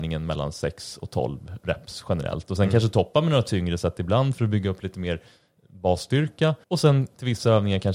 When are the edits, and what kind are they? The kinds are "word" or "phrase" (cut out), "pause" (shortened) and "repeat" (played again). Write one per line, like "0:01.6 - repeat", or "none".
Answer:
0:06.6 - pause